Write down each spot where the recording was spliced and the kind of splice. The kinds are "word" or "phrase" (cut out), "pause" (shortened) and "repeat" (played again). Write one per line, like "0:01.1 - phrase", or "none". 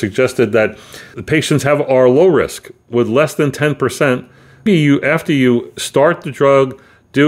0:01.1 - word
0:04.7 - word

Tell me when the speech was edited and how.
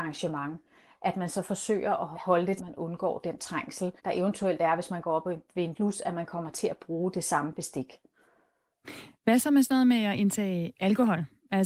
0:02.1 - word
0:02.6 - phrase
0:04.0 - pause
0:05.7 - word

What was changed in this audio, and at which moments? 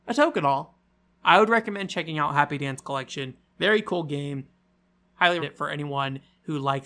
0:01.1 - word
0:05.4 - word

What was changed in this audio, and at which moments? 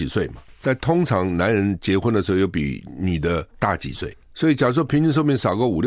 0:03.5 - pause

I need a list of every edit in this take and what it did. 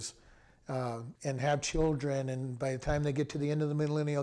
0:01.2 - pause

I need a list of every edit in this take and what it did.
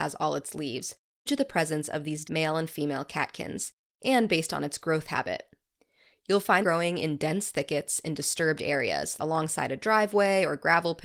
0:01.3 - word
0:02.2 - word
0:06.6 - word
0:09.2 - word

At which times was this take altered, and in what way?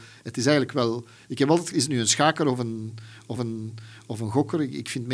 0:01.7 - word
0:03.4 - repeat

